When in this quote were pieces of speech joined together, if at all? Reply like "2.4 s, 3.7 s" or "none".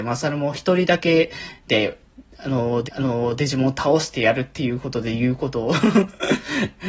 2.9 s

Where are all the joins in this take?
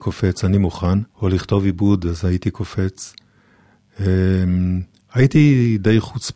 1.1 s, 5.0 s

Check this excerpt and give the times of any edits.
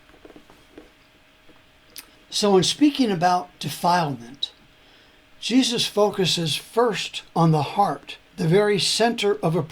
2.1 s, 7.3 s, 8.3 s

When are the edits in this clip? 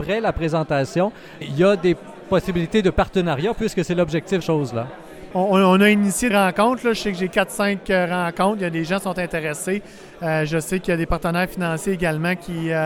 1.4 s, 4.4 s, 6.3 s

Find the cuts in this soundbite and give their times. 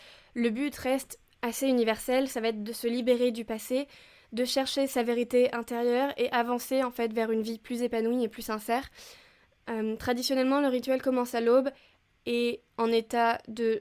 none

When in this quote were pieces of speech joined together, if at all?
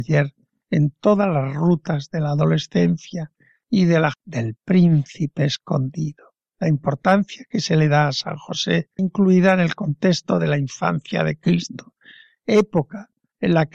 4.1 s, 9.0 s

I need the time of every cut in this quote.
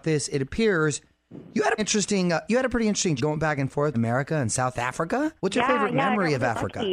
1.8 s, 3.2 s, 3.9 s, 5.4 s

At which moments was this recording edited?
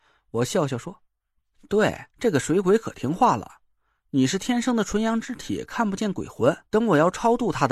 1.1 s, 2.1 s, 6.7 s

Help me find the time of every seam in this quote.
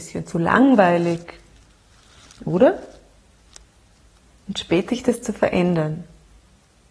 4.9 s

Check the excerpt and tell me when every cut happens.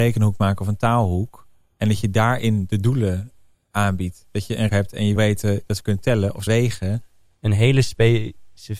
3.5 s, 4.7 s, 5.2 s, 6.5 s

